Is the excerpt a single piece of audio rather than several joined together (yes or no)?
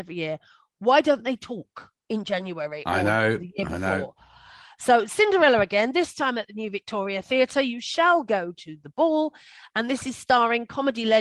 yes